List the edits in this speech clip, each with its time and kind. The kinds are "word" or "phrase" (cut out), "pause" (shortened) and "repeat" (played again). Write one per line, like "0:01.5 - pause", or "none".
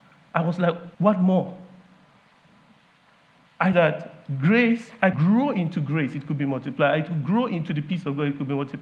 0:00.9 - pause
0:03.7 - phrase
0:05.1 - word

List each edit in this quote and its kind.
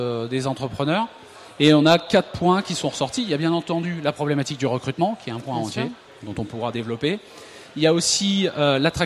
none

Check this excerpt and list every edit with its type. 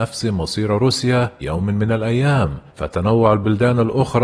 0:01.4 - word
0:02.7 - pause

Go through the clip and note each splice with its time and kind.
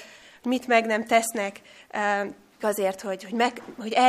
0:02.6 - word

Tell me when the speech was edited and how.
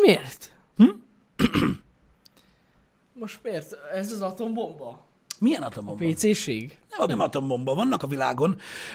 0:01.8 - pause
0:07.1 - word
0:08.0 - word

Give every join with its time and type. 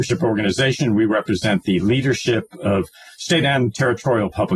none

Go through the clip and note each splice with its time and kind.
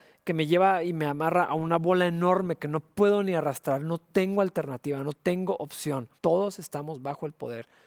0:06.2 - pause

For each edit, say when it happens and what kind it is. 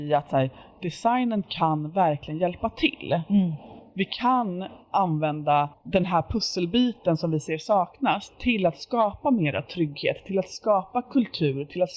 0:05.7 - pause

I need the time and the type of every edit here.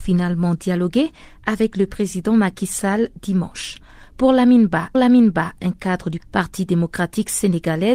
0:04.9 - repeat
0:06.2 - word

